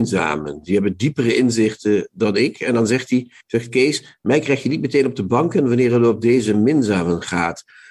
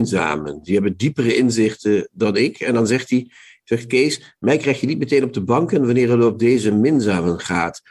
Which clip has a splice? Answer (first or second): first